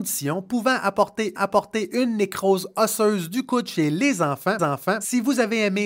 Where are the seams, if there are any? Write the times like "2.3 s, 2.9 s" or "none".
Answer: 1.4 s, 4.6 s